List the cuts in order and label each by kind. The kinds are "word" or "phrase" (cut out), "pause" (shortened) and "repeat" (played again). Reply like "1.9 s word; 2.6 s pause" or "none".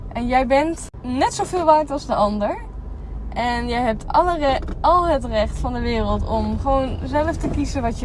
none